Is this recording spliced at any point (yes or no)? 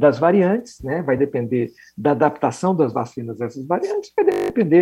no